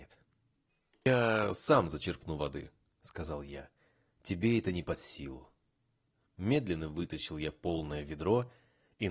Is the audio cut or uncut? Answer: uncut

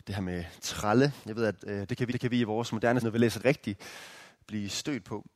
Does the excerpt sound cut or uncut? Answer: cut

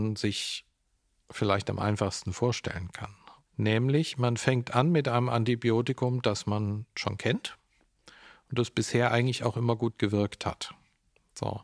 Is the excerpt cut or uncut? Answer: uncut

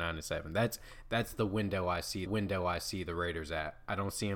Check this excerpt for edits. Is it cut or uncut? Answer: cut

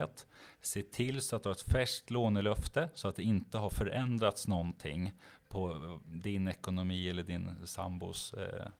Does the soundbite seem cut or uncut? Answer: uncut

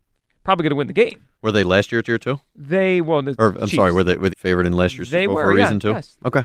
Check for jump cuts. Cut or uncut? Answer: cut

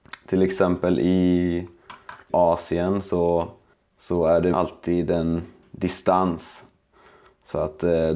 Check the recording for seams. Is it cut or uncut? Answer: cut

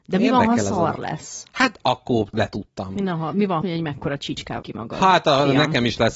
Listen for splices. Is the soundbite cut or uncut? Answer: cut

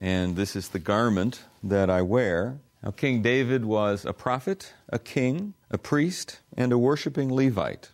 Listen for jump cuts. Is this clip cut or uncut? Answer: cut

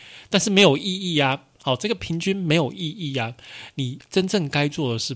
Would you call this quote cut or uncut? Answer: cut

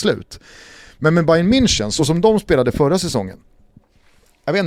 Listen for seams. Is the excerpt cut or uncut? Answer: uncut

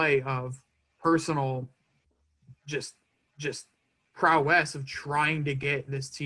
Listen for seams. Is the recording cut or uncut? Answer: cut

